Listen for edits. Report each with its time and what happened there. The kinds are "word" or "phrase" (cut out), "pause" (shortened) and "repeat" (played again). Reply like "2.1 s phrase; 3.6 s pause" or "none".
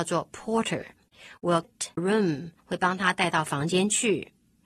1.6 s word; 2.0 s phrase; 2.6 s pause